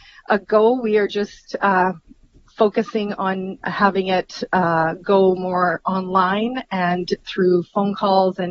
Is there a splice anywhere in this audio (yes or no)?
no